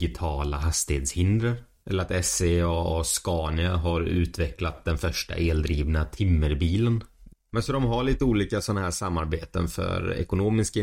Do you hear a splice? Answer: no; 0 cuts

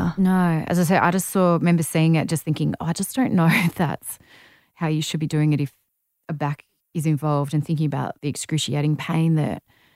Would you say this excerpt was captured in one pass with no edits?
yes; 0 cuts

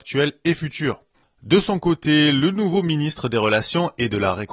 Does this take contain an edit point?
no; 0 cuts

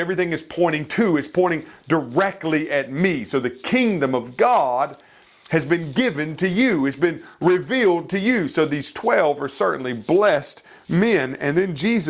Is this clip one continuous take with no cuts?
yes; 0 cuts

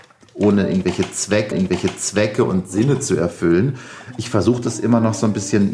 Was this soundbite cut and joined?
yes; 1 cut; at 1.5 s

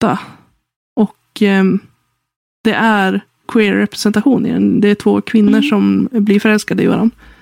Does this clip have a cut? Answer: yes; 1 cut; at 3.4 s

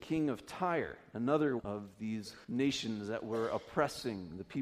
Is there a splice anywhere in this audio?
yes; 2 cuts; at 1.6 s, 2.4 s

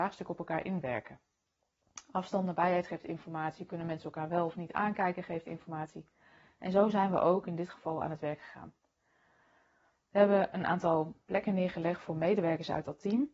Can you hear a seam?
no; 0 cuts

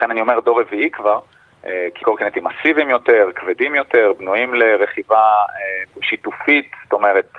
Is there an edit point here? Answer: yes; 2 cuts; at 2.0 s, 5.9 s

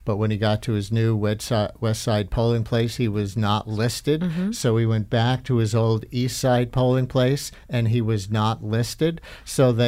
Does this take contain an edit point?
no; 0 cuts

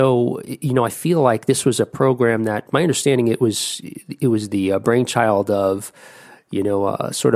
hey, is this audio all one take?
yes; 0 cuts

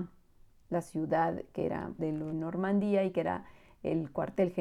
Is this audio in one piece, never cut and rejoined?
no; 2 cuts; at 2.0 s, 2.3 s

